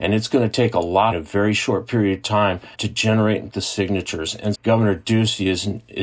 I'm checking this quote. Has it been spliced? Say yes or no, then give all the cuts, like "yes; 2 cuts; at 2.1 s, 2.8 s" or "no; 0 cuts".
yes; 4 cuts; at 1.1 s, 2.7 s, 3.5 s, 4.5 s